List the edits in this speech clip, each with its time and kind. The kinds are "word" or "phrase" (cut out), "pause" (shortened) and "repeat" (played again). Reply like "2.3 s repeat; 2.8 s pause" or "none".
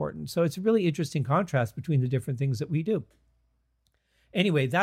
none